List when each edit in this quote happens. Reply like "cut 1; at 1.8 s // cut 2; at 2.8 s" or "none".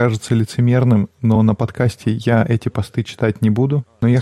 none